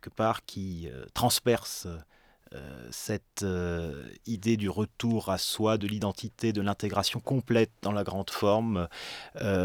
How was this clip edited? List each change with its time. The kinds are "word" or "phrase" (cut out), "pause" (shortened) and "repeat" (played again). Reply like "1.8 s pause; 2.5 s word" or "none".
none